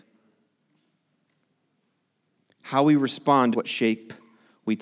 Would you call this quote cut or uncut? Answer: cut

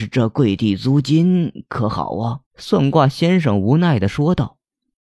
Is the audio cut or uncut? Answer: cut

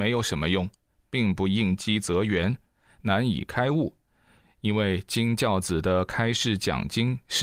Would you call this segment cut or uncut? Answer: uncut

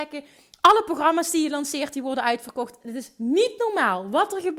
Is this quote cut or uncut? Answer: uncut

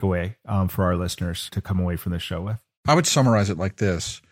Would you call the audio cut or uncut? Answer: cut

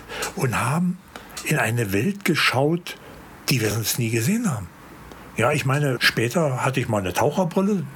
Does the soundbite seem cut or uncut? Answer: uncut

